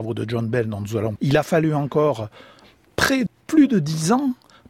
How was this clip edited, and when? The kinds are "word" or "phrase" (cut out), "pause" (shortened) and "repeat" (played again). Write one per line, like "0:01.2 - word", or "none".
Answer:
0:01.2 - word
0:03.3 - word